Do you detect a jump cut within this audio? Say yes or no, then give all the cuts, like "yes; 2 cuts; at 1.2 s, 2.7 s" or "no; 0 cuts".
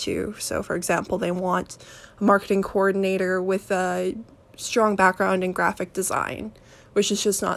no; 0 cuts